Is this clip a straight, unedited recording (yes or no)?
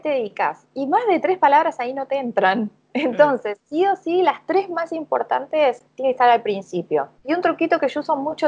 no